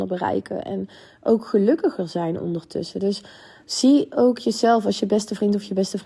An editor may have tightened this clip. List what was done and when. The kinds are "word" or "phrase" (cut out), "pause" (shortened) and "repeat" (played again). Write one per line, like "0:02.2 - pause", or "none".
none